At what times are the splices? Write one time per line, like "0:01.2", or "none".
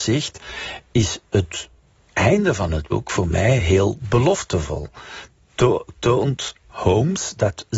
none